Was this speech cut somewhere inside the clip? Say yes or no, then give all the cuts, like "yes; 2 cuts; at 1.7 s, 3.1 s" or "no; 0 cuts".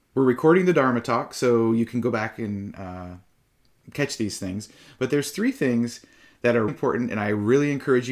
yes; 1 cut; at 6.7 s